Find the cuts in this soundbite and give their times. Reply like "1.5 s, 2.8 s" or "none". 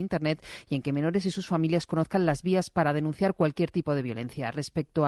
none